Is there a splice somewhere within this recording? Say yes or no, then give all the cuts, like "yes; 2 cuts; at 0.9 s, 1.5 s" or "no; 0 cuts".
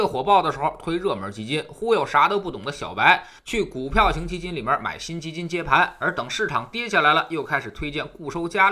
yes; 1 cut; at 3.4 s